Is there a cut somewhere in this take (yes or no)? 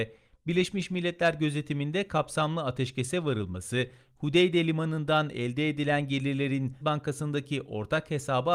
yes